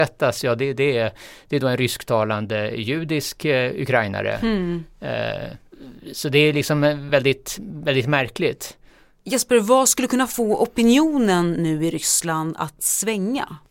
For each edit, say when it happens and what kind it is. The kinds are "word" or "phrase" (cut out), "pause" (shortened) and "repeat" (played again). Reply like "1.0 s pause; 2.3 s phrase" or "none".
none